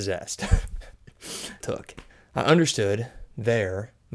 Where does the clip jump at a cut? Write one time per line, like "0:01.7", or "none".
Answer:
0:01.6
0:02.1